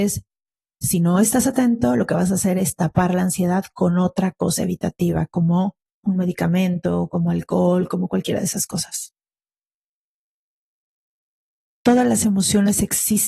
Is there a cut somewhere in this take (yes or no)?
no